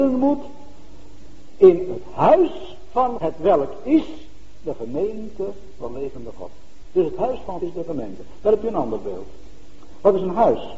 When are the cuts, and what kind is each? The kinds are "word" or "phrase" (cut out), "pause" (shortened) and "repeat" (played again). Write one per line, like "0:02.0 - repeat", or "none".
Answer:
0:03.2 - word
0:05.8 - word
0:07.6 - word

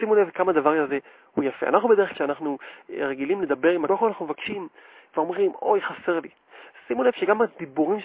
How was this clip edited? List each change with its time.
0:02.1 - word
0:03.9 - word

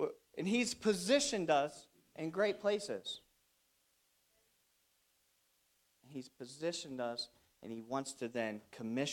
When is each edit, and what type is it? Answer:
none

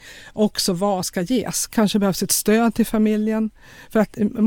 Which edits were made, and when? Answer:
0:01.0 - word

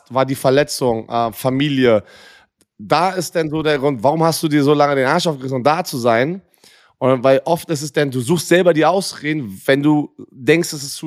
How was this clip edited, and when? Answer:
none

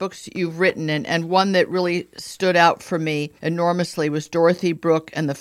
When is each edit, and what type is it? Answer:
0:03.4 - pause

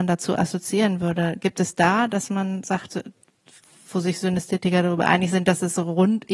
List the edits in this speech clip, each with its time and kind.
0:02.9 - word

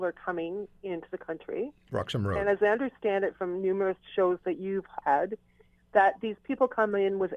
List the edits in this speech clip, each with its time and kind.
0:05.0 - word

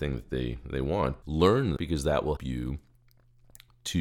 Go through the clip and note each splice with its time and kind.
0:01.2 - word
0:01.8 - word
0:02.4 - word

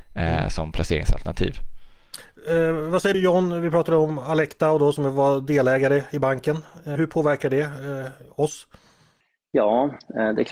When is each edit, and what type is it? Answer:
0:03.1 - phrase
0:07.0 - word

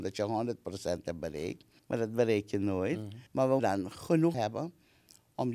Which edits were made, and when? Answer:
0:01.8 - pause
0:03.3 - pause
0:03.6 - word
0:04.3 - word

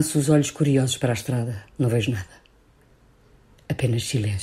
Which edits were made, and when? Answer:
0:01.7 - pause

